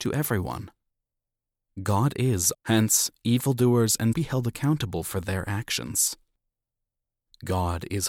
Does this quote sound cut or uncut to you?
cut